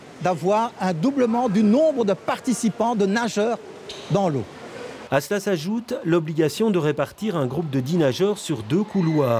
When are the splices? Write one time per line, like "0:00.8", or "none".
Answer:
none